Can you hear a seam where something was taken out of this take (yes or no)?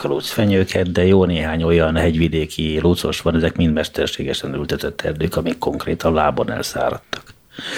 no